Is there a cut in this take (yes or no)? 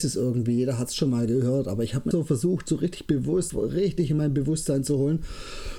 yes